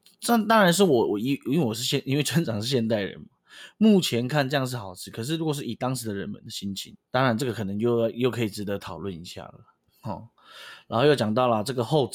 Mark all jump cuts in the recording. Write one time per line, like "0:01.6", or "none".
0:07.1
0:09.8

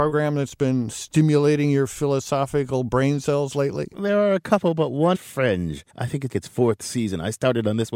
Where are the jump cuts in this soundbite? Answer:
0:05.1
0:05.9
0:06.3

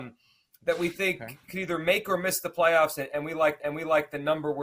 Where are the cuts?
0:03.6

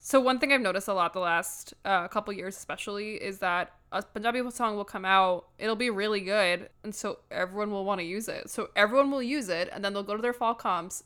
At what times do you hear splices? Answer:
0:06.7

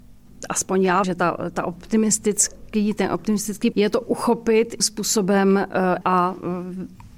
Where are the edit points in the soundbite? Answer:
0:01.0
0:03.7
0:04.8
0:06.0

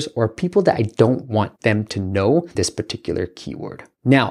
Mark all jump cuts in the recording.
0:01.6
0:02.5

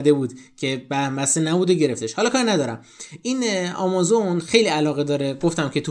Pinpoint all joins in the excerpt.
none

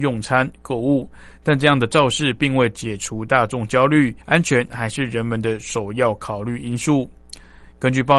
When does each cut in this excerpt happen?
0:04.2

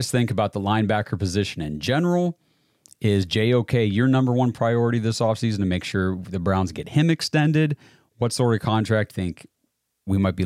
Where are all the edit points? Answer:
0:09.1

